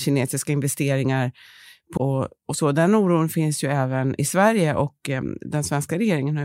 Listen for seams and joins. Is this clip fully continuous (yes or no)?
no